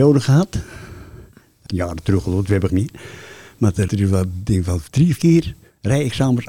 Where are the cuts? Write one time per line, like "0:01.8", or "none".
0:01.7
0:02.7
0:03.9
0:05.2